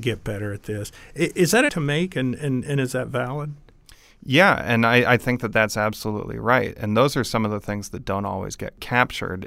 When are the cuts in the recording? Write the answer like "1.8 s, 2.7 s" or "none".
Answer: 1.7 s